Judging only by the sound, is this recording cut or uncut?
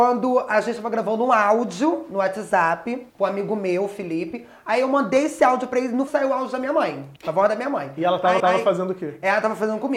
cut